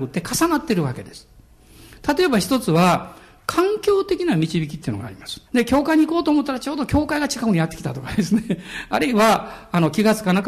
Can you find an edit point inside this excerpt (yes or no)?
yes